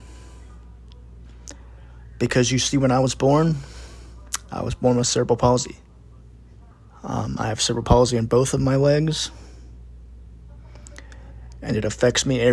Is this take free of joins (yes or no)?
no